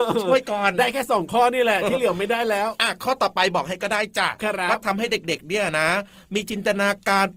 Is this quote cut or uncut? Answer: uncut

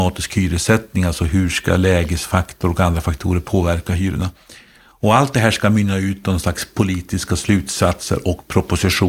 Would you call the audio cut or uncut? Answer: uncut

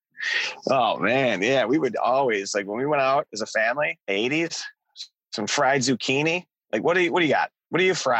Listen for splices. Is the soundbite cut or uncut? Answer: cut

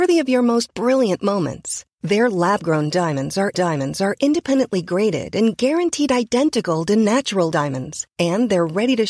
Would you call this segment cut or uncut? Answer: cut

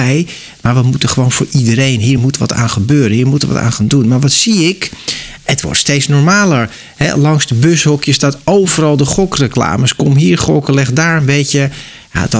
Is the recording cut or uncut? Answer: uncut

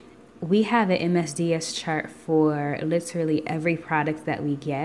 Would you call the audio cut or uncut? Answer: uncut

